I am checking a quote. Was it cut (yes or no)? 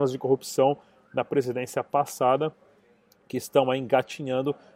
no